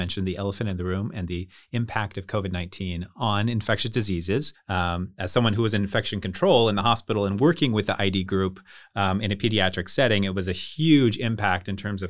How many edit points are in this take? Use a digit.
0